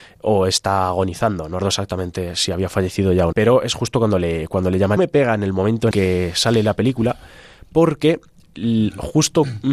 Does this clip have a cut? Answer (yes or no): yes